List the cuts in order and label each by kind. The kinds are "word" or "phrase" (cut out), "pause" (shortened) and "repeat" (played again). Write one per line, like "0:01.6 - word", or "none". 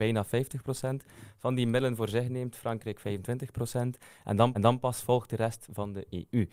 0:04.5 - repeat